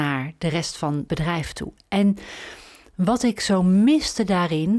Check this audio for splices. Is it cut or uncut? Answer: cut